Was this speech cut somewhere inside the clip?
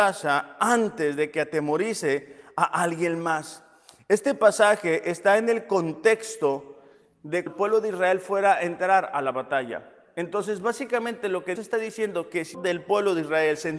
yes; 3 cuts; at 7.5 s, 11.6 s, 12.5 s

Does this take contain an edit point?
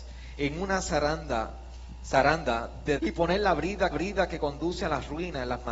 yes; 2 cuts; at 3.0 s, 3.9 s

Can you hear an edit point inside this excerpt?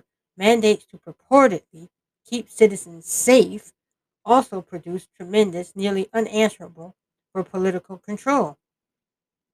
no; 0 cuts

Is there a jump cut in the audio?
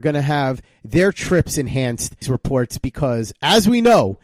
yes; 1 cut; at 2.2 s

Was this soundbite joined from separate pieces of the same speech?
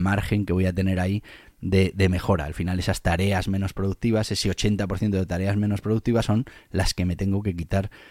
no; 0 cuts

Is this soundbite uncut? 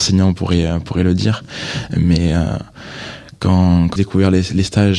no; 1 cut; at 4.0 s

